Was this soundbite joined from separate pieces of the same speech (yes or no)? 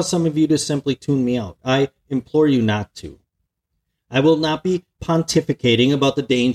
no